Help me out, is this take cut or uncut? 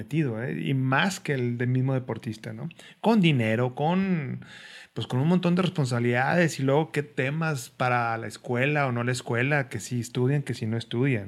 uncut